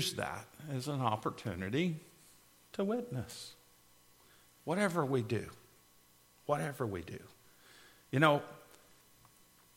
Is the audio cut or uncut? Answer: uncut